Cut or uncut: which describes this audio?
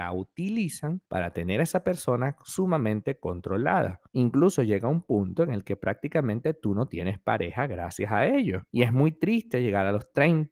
cut